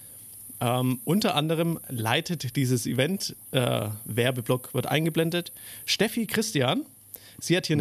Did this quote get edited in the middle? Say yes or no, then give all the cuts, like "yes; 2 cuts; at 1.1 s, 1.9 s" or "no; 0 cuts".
no; 0 cuts